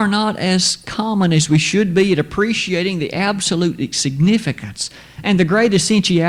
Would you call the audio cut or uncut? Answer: uncut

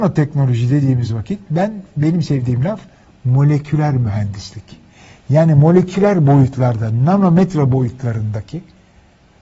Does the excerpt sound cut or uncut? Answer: uncut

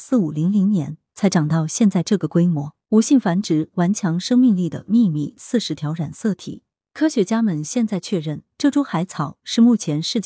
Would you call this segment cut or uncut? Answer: cut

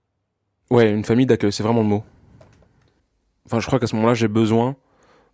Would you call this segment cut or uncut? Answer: uncut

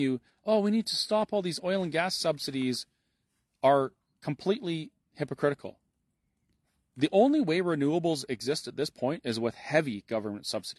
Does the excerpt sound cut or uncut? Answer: uncut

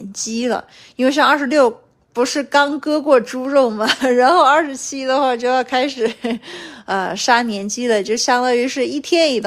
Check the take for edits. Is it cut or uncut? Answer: uncut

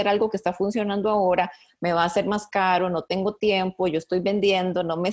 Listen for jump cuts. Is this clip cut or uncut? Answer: uncut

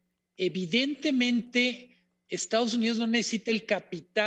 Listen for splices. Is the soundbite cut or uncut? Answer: uncut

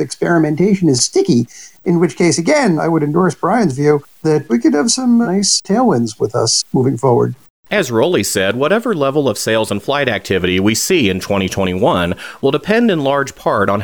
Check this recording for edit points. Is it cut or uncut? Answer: uncut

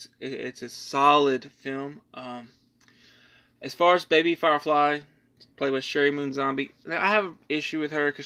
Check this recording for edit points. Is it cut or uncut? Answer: uncut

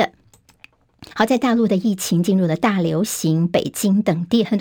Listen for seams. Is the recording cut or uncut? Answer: cut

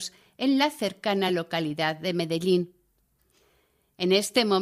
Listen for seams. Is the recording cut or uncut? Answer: uncut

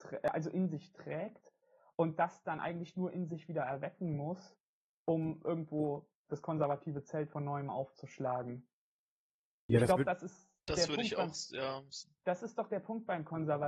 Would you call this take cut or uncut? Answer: uncut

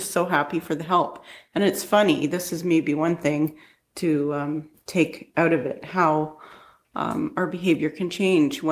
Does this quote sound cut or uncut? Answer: uncut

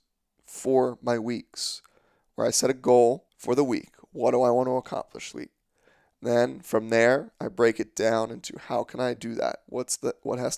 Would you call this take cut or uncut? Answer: cut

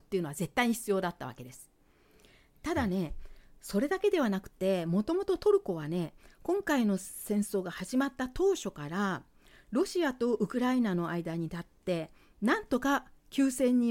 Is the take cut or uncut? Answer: uncut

